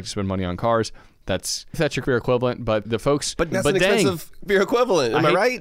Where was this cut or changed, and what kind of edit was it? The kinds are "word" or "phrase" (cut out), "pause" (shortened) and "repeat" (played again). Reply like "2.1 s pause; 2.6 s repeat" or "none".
1.7 s word; 2.0 s word; 2.8 s word; 3.5 s word; 4.5 s word

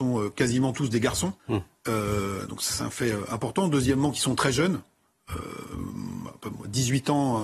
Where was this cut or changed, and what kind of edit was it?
1.4 s pause

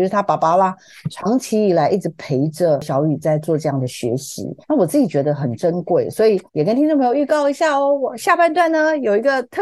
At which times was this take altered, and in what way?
4.6 s pause; 6.5 s pause

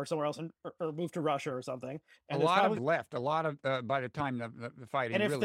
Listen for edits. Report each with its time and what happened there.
2.8 s phrase

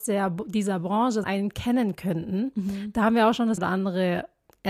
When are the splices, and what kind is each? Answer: 1.2 s phrase; 3.6 s word

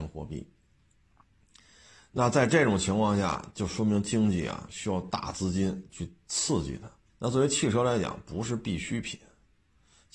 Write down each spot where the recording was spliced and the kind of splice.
7.1 s pause

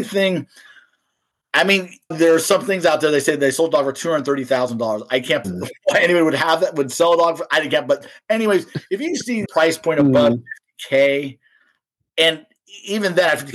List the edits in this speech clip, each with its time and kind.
2.1 s phrase; 5.4 s word; 9.5 s word

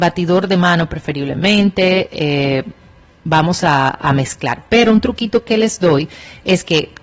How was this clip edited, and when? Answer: none

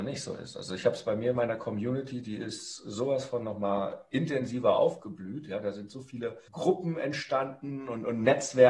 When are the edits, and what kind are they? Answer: 6.5 s pause

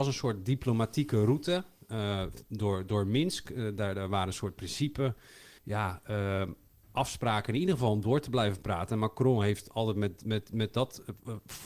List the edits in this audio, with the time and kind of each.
5.6 s pause

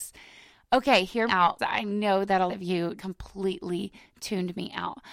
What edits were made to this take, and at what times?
1.3 s word; 1.6 s word; 2.5 s word; 3.0 s word

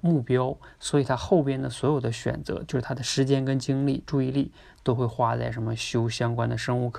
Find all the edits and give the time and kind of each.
none

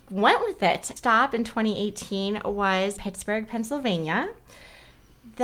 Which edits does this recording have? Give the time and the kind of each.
1.0 s phrase; 3.0 s word

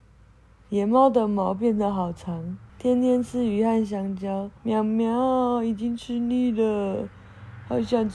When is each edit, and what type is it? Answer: 2.7 s pause; 4.6 s pause

